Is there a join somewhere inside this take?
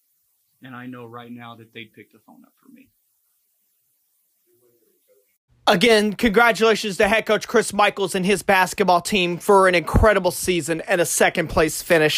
no; 0 cuts

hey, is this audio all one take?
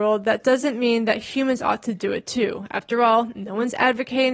yes; 0 cuts

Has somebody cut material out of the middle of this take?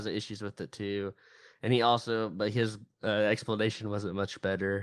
no; 0 cuts

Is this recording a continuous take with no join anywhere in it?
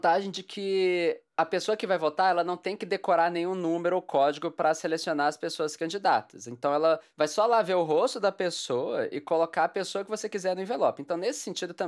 yes; 0 cuts

